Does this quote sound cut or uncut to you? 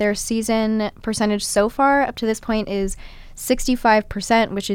uncut